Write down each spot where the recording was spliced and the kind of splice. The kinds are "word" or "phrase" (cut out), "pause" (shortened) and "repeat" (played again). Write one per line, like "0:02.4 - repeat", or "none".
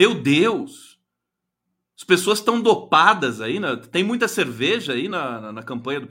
none

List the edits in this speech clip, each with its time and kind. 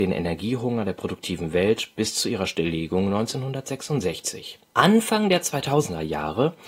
0:04.7 - pause

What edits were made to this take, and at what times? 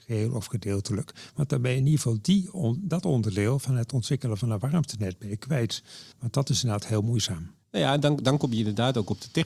0:06.1 - pause

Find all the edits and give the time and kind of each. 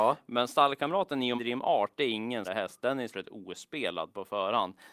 0:01.4 - word
0:02.4 - word
0:03.1 - word

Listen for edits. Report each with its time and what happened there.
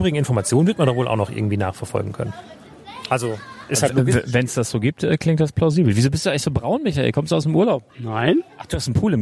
0:07.9 - pause

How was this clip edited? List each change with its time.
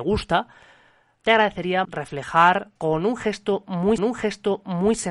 0:01.8 - phrase
0:02.8 - pause
0:04.0 - repeat

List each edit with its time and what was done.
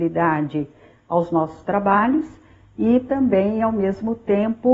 none

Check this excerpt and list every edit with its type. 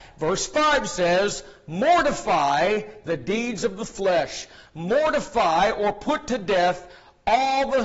none

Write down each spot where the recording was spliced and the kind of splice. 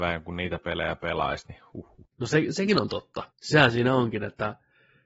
0:02.1 - pause
0:03.3 - pause

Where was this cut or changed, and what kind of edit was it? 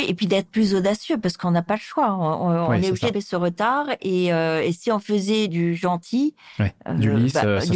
0:03.1 - word

